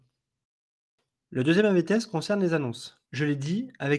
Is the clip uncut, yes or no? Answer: no